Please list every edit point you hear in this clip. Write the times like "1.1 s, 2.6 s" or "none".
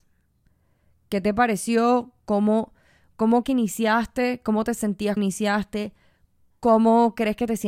3.4 s, 5.2 s